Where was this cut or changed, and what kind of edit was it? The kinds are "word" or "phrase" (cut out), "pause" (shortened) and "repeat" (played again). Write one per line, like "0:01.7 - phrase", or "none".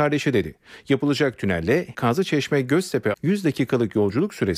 0:01.9 - word
0:03.1 - word